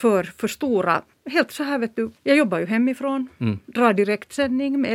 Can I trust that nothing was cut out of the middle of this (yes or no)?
no